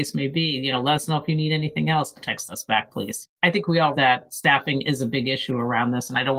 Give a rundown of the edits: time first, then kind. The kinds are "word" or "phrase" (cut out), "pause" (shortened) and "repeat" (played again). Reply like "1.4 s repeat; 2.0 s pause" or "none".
2.2 s phrase; 3.4 s pause; 3.9 s word